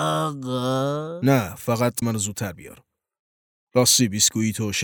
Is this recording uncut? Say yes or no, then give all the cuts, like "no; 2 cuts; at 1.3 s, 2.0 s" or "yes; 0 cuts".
no; 1 cut; at 2.0 s